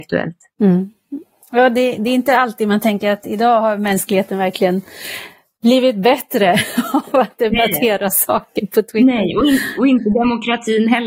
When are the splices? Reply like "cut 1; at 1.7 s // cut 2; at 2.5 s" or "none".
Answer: none